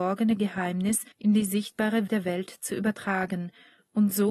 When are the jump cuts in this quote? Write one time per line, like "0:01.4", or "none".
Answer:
0:01.1
0:02.1